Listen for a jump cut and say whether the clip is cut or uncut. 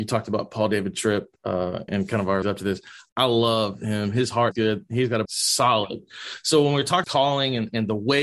cut